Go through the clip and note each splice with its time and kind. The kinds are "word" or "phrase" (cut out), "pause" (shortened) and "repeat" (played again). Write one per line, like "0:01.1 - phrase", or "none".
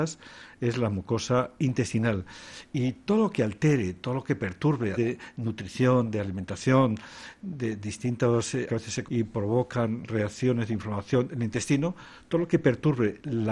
0:04.9 - phrase
0:08.7 - word
0:09.1 - word